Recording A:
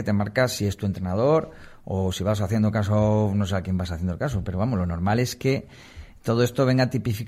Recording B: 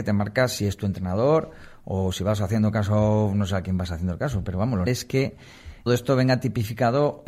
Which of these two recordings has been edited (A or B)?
B